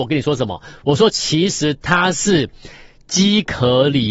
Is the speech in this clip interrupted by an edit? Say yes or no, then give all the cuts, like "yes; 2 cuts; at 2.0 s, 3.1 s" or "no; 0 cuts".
no; 0 cuts